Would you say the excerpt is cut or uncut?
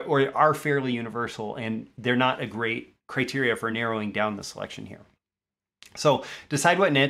uncut